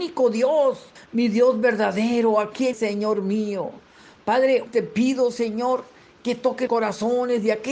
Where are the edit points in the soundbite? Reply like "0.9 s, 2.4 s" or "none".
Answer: 1.0 s, 2.7 s, 4.7 s, 6.7 s